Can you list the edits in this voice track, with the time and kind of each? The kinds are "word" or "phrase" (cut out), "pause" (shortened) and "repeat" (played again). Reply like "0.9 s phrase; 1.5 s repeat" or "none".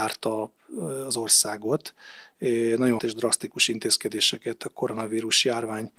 3.0 s word; 4.6 s word

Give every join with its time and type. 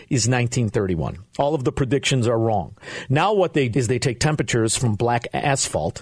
3.7 s word

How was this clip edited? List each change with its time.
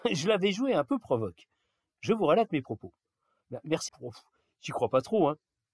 3.9 s phrase

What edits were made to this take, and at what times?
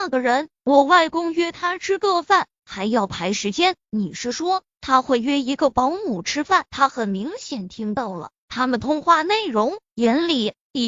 6.7 s pause

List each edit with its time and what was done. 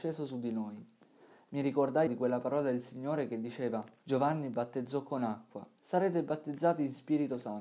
2.1 s word; 4.0 s pause; 5.8 s phrase

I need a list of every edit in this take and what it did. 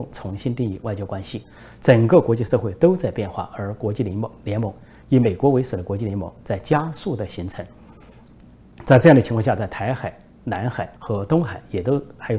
11.0 s pause

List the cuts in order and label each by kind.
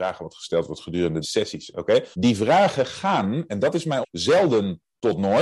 1.2 s word; 2.1 s pause; 4.0 s word

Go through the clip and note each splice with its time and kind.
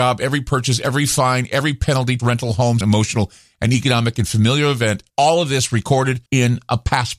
2.2 s word; 2.8 s phrase; 5.1 s pause; 6.3 s pause

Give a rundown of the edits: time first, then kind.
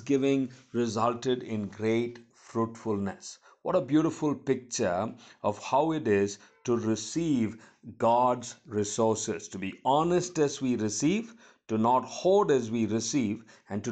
none

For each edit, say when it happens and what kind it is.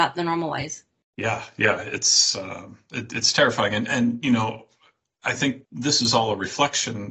none

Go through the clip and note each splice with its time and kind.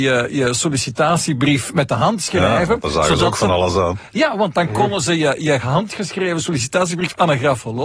5.4 s word

